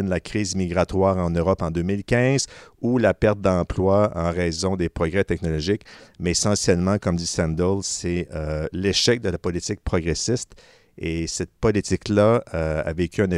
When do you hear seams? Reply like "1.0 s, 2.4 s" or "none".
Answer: none